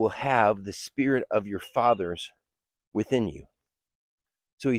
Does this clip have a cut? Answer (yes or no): no